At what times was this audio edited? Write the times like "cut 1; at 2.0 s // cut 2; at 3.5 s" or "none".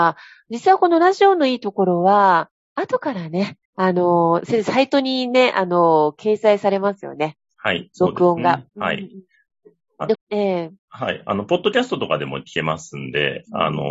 cut 1; at 3.7 s // cut 2; at 8.7 s // cut 3; at 10.1 s

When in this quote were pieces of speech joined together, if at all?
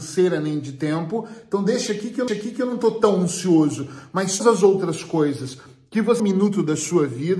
cut 1; at 2.3 s // cut 2; at 4.4 s // cut 3; at 6.2 s

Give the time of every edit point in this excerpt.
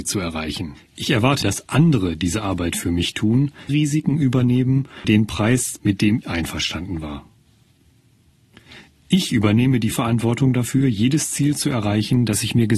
cut 1; at 1.4 s // cut 2; at 3.7 s // cut 3; at 5.0 s // cut 4; at 5.8 s // cut 5; at 6.2 s // cut 6; at 9.9 s

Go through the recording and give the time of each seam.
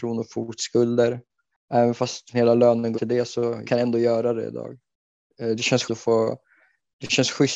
cut 1; at 2.3 s // cut 2; at 2.9 s // cut 3; at 3.6 s // cut 4; at 5.8 s

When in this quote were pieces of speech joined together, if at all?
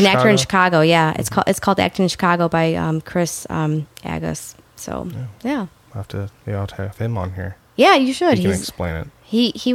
cut 1; at 6.4 s

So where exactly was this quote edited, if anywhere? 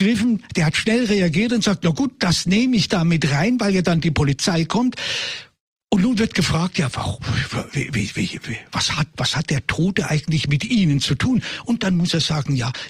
cut 1; at 9.1 s

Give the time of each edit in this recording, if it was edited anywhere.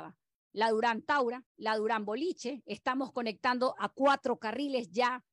cut 1; at 1.5 s

